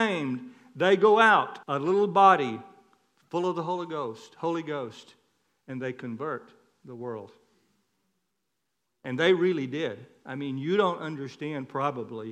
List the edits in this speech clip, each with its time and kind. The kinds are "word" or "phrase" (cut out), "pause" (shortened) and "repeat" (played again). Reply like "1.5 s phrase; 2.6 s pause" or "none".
1.6 s pause